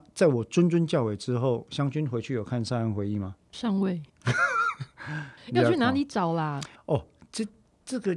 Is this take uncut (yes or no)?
no